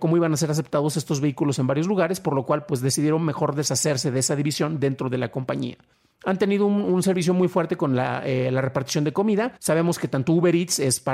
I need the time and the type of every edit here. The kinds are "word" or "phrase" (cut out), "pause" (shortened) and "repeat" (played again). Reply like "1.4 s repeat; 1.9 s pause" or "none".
5.9 s pause; 9.6 s pause